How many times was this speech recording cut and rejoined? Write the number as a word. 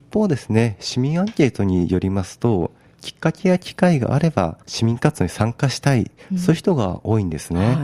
one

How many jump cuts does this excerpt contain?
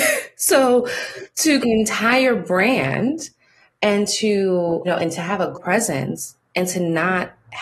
three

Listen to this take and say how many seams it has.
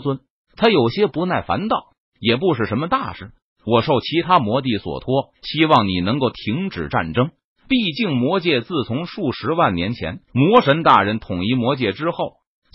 two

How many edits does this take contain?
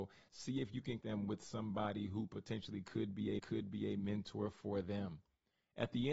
two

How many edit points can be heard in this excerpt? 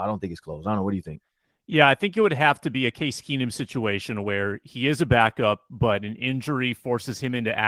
zero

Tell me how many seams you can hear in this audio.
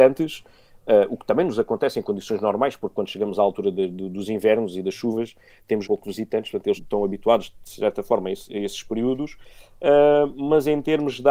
two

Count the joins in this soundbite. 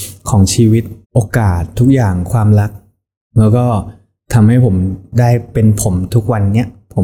one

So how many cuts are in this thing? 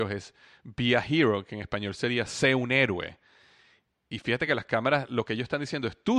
zero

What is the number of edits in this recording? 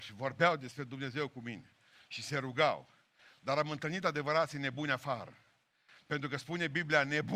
zero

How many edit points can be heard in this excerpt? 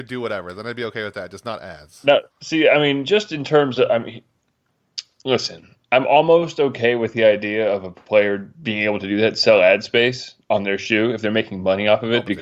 one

